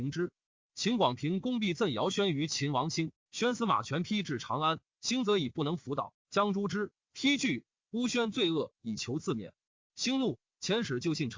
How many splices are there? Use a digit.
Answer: 0